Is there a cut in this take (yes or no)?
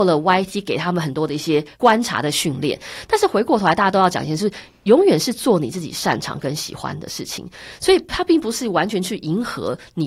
yes